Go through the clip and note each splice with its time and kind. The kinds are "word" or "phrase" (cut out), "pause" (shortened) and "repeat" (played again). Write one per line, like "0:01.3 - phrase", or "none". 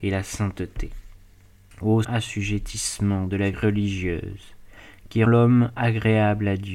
0:02.0 - word
0:03.5 - word
0:05.3 - word